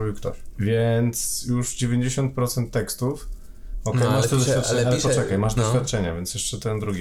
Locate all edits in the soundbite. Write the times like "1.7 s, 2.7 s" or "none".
none